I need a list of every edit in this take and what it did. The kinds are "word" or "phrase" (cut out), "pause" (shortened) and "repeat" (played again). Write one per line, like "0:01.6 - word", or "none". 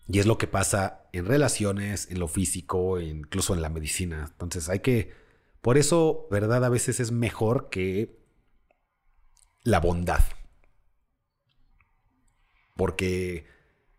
0:06.3 - word